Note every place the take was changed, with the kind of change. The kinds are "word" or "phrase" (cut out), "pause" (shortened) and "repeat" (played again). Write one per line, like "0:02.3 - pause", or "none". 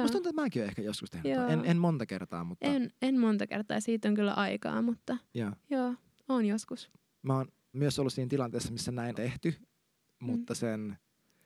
0:07.7 - word
0:09.1 - word

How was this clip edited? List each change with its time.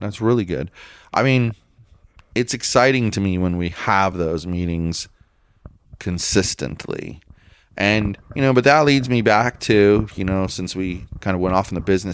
none

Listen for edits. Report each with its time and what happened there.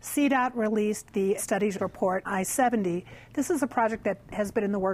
0:01.4 - word
0:01.8 - word
0:02.2 - word

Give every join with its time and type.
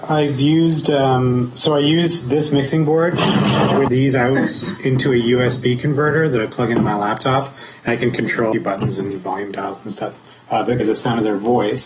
0:03.9 - word
0:07.9 - word
0:08.5 - phrase
0:10.3 - pause
0:10.8 - word

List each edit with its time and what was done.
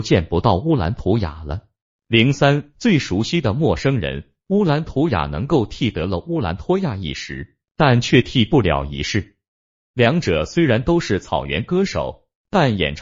none

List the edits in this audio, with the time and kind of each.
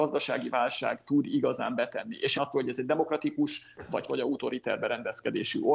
0:02.4 - phrase
0:04.1 - phrase

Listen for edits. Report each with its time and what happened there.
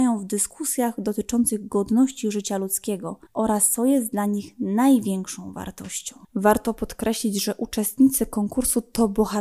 0:03.3 - pause
0:06.2 - pause

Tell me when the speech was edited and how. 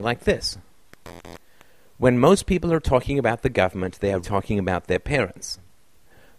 0:04.2 - word

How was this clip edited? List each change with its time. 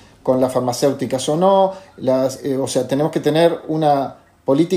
none

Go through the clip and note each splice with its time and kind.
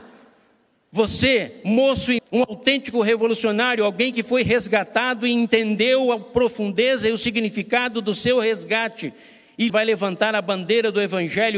0:02.2 - word
0:09.7 - phrase

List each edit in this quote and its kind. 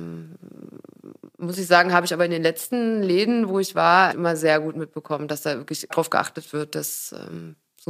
0:04.1 - word
0:05.9 - phrase

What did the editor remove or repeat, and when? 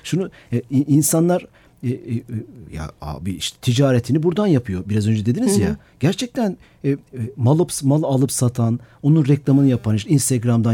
none

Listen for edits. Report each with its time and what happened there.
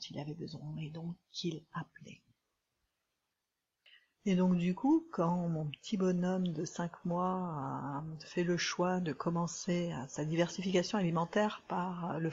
none

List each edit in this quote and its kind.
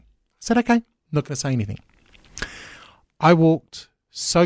none

